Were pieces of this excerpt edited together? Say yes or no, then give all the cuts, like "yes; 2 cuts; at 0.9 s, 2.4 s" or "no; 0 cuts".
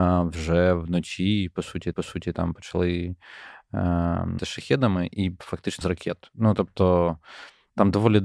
yes; 3 cuts; at 1.9 s, 4.4 s, 5.8 s